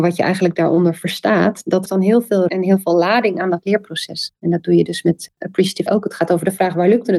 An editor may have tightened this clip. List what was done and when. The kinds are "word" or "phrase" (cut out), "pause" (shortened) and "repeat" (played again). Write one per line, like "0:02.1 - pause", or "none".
0:01.9 - word
0:02.5 - word
0:05.9 - word